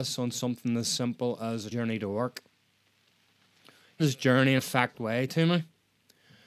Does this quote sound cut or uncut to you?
cut